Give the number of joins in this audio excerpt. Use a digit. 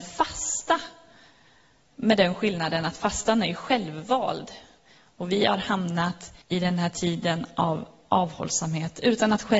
1